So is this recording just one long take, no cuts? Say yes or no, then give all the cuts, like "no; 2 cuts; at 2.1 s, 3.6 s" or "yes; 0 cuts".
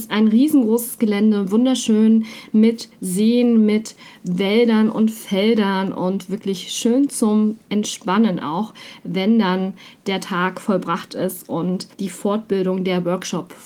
no; 1 cut; at 11.9 s